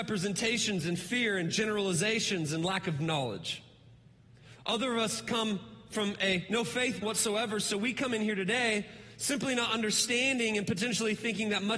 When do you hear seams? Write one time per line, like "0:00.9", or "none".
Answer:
0:07.0

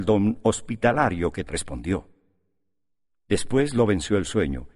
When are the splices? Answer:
0:01.5

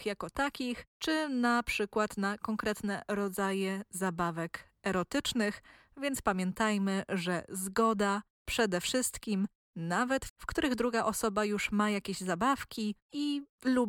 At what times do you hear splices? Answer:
0:10.3

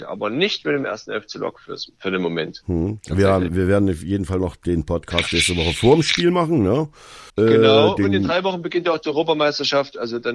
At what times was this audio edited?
0:03.5
0:07.3

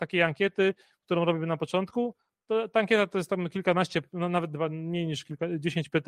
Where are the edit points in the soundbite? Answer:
none

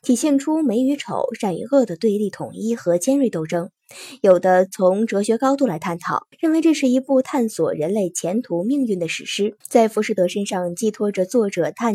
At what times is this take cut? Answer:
0:06.3
0:09.6

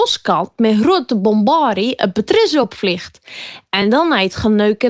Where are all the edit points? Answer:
none

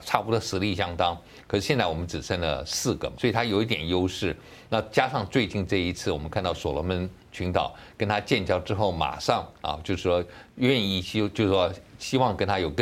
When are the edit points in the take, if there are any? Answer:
0:03.1

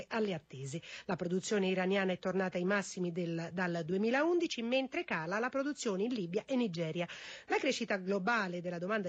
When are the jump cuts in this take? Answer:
none

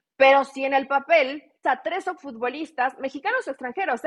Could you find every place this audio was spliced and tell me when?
0:01.6
0:02.2

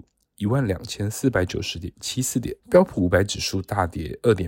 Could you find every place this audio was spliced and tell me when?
0:02.6

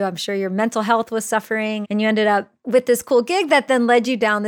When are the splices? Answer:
0:01.8

